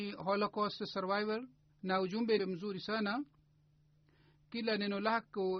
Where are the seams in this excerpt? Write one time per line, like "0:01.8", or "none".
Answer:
0:01.7
0:02.4